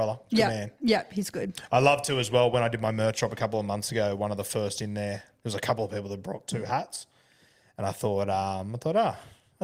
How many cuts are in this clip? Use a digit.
0